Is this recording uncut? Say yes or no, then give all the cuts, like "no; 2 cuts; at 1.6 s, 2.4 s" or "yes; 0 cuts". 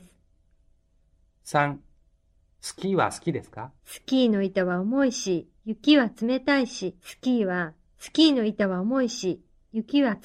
no; 3 cuts; at 3.8 s, 5.6 s, 7.0 s